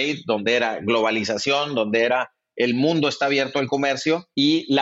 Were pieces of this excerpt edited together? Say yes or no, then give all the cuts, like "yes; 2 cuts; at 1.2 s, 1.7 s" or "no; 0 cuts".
no; 0 cuts